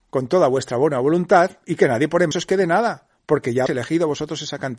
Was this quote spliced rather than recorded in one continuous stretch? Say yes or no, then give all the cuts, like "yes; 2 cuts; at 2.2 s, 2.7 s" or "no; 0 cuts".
yes; 3 cuts; at 1.6 s, 2.3 s, 3.7 s